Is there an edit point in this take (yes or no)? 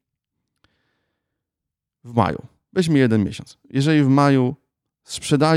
no